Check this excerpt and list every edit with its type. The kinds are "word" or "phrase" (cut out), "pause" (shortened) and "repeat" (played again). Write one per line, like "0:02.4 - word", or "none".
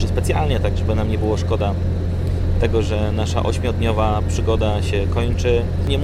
none